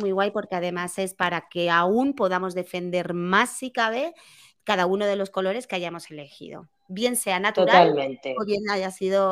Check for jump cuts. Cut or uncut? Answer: uncut